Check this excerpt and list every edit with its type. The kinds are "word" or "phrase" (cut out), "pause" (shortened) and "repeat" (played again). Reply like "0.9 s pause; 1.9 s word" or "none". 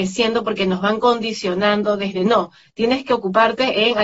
none